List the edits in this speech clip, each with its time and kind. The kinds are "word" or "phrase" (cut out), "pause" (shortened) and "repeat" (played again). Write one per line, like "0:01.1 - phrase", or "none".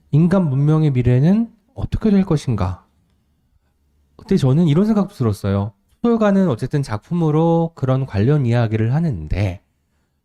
none